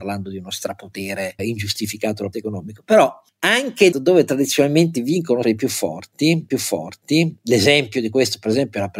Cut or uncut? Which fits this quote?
cut